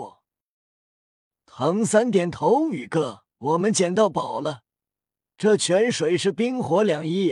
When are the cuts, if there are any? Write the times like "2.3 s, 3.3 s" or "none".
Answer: 3.3 s